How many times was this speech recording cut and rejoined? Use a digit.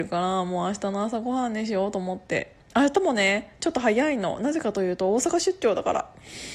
1